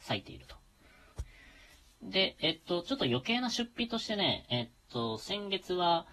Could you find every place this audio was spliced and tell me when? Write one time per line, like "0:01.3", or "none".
none